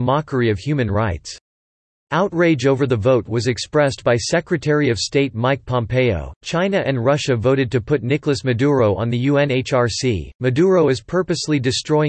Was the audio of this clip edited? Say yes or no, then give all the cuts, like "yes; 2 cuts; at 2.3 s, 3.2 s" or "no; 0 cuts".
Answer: no; 0 cuts